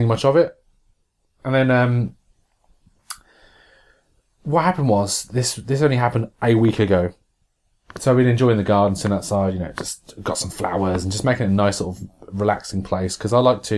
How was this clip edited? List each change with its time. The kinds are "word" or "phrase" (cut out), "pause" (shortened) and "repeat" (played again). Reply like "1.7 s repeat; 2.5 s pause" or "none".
none